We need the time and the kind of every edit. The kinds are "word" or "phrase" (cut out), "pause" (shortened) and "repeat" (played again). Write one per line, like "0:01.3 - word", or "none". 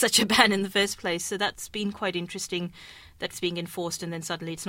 0:03.3 - word

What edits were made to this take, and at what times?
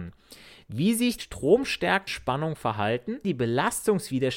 0:01.2 - word
0:02.1 - word
0:03.2 - word

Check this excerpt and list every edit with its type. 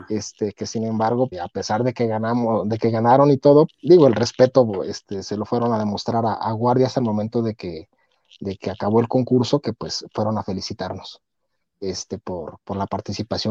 0:01.3 - word
0:03.7 - word

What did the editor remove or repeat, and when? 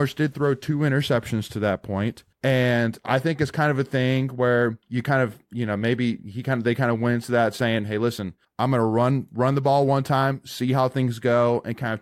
0:02.3 - pause
0:04.8 - pause
0:08.4 - pause

